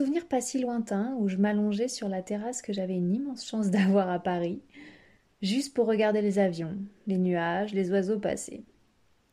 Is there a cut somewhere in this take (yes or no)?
no